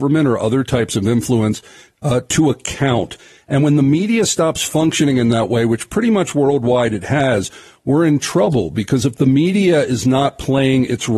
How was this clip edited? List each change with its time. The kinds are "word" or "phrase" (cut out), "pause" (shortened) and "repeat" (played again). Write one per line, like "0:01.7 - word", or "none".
none